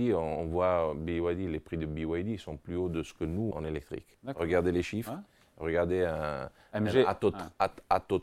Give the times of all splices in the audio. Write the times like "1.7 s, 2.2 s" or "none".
3.5 s